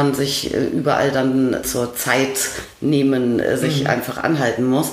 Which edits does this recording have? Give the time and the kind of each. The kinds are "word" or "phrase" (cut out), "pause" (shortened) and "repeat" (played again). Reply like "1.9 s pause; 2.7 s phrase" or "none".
1.6 s phrase